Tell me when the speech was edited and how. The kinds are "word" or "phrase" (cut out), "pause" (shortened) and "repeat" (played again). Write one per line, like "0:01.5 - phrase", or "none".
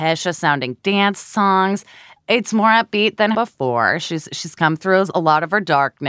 0:03.3 - word